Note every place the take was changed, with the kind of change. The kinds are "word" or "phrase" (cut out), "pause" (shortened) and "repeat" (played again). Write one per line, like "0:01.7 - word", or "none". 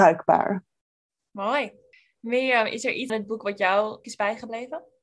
0:03.1 - word
0:04.0 - word